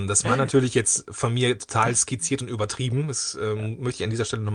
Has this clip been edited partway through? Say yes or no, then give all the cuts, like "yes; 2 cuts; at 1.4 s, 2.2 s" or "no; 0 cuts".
no; 0 cuts